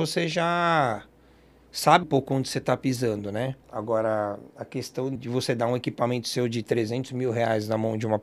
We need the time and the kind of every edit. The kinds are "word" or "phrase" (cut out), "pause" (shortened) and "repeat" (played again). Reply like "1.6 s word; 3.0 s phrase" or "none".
2.0 s word; 3.6 s pause; 5.2 s word